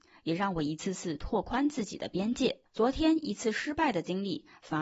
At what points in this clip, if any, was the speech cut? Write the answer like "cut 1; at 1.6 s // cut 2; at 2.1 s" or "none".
cut 1; at 2.7 s